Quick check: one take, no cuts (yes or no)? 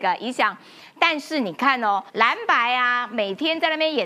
no